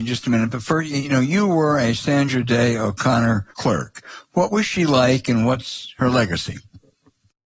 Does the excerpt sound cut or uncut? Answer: cut